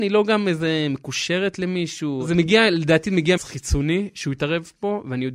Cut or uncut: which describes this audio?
cut